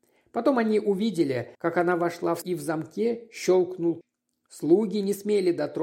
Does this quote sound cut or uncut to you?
cut